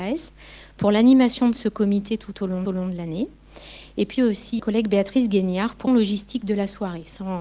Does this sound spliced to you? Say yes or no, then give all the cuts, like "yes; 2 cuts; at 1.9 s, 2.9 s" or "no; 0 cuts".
yes; 4 cuts; at 2.7 s, 4.2 s, 4.6 s, 5.9 s